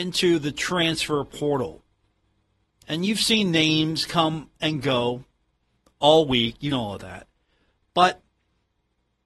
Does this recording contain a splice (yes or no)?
yes